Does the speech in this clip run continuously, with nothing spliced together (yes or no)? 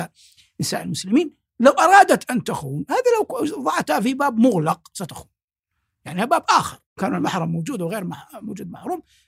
yes